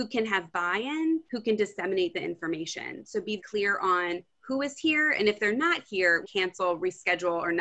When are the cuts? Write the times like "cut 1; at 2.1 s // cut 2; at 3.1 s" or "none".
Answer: cut 1; at 1.2 s // cut 2; at 3.4 s // cut 3; at 6.2 s